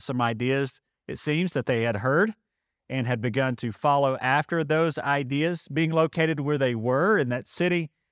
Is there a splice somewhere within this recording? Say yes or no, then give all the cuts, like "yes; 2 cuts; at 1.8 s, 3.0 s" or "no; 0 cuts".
no; 0 cuts